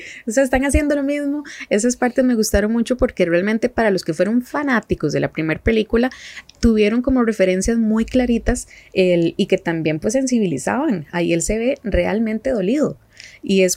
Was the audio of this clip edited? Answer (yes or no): no